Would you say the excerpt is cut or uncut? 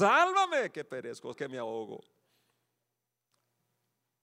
cut